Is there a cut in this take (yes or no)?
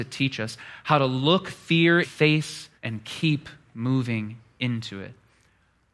yes